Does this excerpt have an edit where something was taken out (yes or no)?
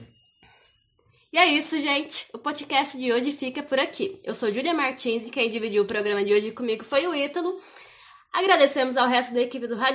no